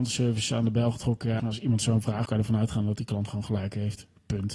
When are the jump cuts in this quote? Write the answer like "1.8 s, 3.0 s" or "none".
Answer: 1.4 s, 2.3 s